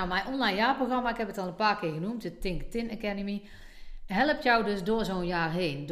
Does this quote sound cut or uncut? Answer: uncut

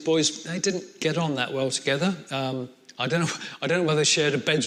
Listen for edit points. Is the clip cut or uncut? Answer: uncut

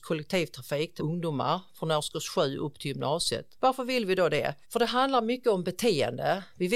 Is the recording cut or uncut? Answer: cut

